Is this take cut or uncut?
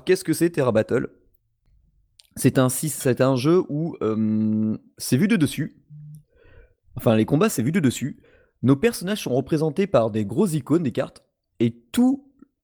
uncut